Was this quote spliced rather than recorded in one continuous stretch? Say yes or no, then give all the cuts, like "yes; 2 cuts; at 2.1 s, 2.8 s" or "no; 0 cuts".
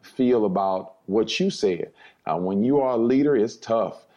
no; 0 cuts